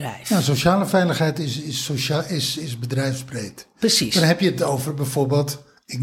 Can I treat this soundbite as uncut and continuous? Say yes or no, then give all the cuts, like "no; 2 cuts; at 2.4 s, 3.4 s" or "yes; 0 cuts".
yes; 0 cuts